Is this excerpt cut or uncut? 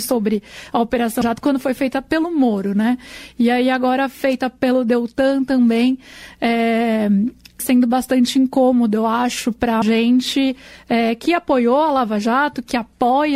cut